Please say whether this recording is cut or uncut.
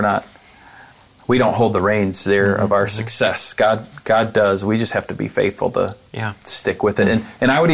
uncut